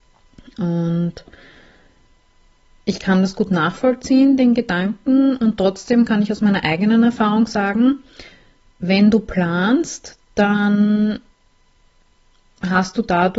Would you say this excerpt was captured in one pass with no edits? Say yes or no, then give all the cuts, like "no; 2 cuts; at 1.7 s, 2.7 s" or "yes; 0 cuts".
yes; 0 cuts